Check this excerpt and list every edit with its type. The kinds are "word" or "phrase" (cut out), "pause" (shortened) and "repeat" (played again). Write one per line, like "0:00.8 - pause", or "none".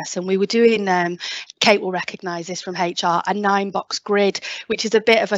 none

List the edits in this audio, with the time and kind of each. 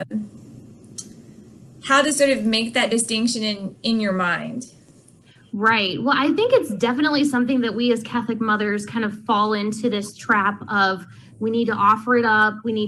none

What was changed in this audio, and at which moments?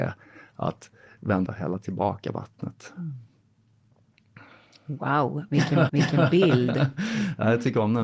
0:01.5 - phrase
0:05.9 - repeat

